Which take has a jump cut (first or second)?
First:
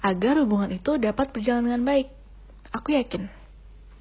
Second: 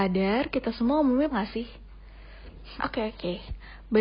second